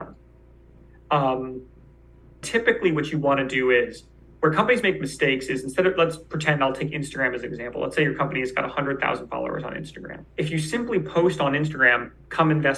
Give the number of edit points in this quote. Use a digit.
2